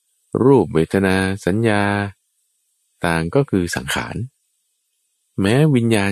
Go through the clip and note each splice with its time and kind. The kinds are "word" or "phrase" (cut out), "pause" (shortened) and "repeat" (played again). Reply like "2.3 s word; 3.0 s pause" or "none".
none